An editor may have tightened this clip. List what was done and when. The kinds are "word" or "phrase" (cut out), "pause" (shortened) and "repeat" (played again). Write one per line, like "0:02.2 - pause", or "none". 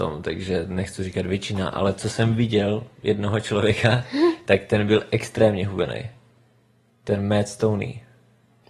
none